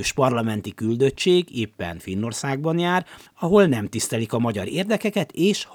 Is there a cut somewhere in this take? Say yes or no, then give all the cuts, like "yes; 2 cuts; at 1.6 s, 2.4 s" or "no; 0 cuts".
no; 0 cuts